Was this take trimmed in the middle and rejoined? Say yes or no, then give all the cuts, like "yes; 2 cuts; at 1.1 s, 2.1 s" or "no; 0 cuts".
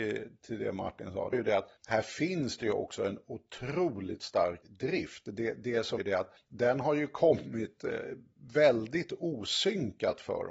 yes; 5 cuts; at 1.3 s, 1.8 s, 4.6 s, 6.0 s, 6.4 s